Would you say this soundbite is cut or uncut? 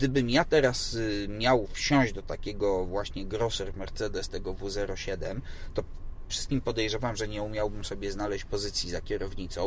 cut